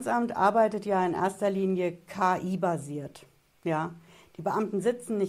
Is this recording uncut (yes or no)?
yes